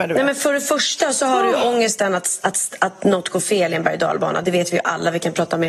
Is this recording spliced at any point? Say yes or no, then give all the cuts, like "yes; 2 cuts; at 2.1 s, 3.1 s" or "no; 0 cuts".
no; 0 cuts